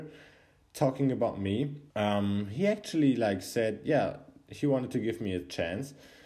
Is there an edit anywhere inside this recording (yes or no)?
yes